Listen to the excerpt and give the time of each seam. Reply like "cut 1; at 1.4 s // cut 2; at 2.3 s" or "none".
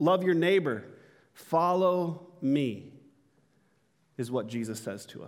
none